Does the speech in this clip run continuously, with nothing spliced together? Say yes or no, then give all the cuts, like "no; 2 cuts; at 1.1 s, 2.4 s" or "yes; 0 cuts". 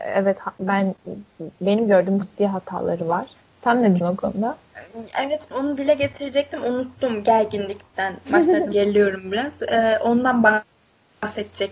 no; 5 cuts; at 2.2 s, 3.4 s, 4.0 s, 5.5 s, 8.7 s